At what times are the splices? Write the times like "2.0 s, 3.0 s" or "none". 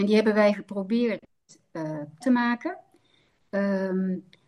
2.2 s